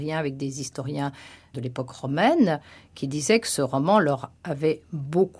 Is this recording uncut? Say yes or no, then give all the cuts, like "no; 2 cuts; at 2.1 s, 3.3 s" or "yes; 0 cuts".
no; 1 cut; at 1.5 s